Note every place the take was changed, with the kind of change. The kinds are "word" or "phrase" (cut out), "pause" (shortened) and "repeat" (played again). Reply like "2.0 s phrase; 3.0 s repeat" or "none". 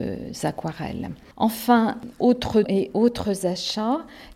2.6 s word